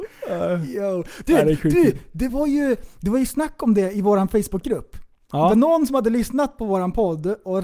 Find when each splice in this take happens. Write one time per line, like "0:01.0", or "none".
none